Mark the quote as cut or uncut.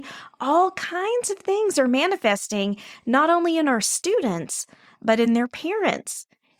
uncut